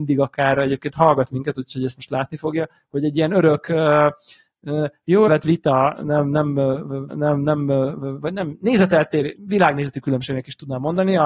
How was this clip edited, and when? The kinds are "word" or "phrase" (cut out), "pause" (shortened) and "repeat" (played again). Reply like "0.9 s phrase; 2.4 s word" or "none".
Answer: 1.9 s word; 5.3 s word; 7.1 s repeat; 9.3 s word